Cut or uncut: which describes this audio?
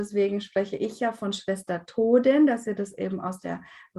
uncut